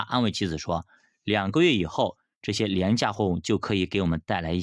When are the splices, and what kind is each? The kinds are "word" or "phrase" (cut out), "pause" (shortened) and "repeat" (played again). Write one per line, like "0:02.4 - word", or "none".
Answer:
none